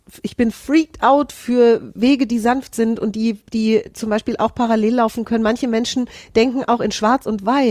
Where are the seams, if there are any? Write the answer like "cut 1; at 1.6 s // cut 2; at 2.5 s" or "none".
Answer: cut 1; at 3.4 s

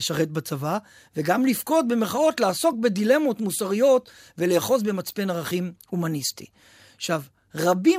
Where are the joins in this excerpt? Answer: none

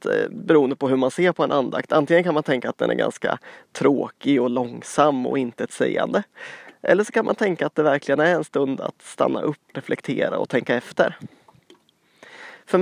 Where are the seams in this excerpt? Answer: cut 1; at 9.7 s

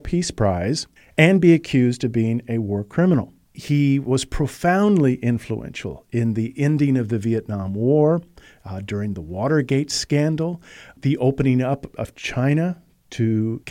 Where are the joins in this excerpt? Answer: cut 1; at 1.0 s

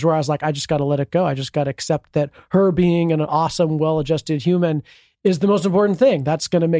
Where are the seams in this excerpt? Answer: none

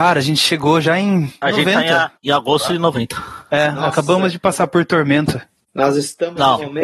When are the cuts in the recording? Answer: cut 1; at 2.2 s

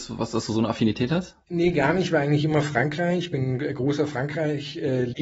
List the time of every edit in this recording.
cut 1; at 1.4 s

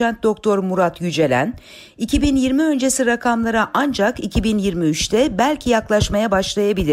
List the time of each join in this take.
none

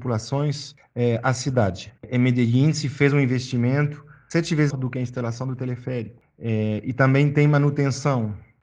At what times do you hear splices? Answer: cut 1; at 2.0 s // cut 2; at 4.7 s

